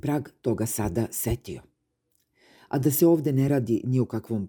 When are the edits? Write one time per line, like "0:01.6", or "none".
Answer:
none